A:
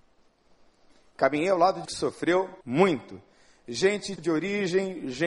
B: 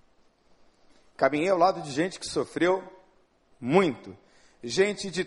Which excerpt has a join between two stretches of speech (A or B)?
A